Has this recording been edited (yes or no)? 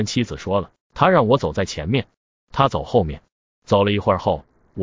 no